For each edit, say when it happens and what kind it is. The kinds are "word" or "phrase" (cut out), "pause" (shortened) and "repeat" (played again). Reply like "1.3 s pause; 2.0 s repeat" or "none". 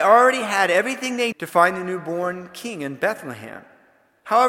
1.3 s word

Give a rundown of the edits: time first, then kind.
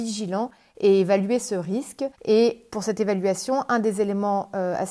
2.1 s pause

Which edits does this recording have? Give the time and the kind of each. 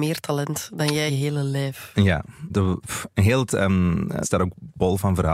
1.1 s word; 2.5 s word; 3.5 s word; 4.2 s word

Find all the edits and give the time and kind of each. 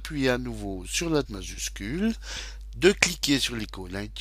1.2 s word

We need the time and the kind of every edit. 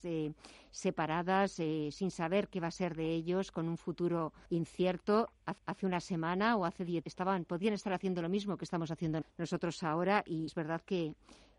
4.5 s pause; 5.6 s repeat; 7.0 s word; 9.2 s word; 10.5 s word

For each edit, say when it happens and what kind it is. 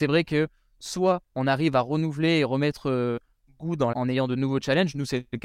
1.3 s pause; 3.9 s word

